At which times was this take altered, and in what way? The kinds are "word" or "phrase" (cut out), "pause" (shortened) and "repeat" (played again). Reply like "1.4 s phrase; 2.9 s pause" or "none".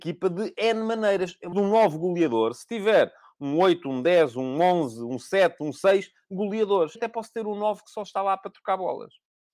1.5 s phrase; 6.9 s word